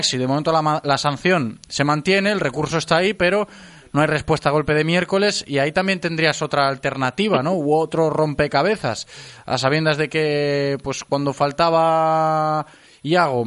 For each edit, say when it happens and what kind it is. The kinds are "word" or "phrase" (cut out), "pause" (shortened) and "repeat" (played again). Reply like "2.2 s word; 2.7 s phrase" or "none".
none